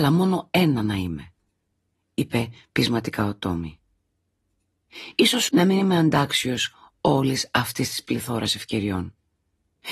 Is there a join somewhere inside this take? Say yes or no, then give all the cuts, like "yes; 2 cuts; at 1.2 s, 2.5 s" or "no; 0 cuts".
yes; 1 cut; at 5.5 s